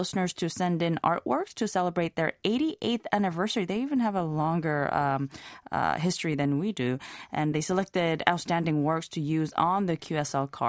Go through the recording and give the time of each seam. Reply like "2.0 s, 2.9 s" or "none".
7.5 s